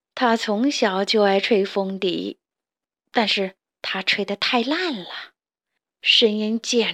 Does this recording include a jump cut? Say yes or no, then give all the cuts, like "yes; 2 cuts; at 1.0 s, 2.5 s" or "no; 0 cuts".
no; 0 cuts